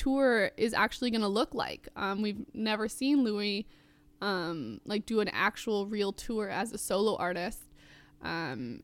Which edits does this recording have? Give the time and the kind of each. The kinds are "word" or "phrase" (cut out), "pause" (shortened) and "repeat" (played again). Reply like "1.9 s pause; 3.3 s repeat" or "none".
none